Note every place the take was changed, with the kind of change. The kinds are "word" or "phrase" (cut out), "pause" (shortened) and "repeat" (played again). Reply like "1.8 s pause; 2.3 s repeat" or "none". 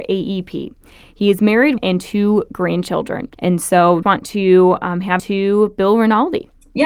1.8 s phrase; 3.3 s pause; 4.0 s word; 5.2 s phrase